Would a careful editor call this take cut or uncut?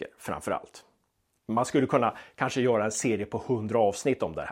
uncut